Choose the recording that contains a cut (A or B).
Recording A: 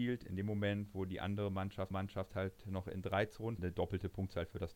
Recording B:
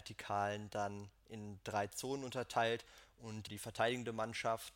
A